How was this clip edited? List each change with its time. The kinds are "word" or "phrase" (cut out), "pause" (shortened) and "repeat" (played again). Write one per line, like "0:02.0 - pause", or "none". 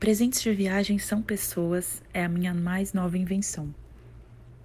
none